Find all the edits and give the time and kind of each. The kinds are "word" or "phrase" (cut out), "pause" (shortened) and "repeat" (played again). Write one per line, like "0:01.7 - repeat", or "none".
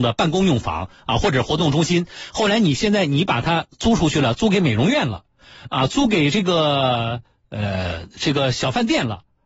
none

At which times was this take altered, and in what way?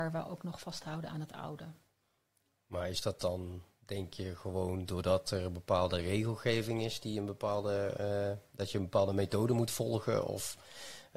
none

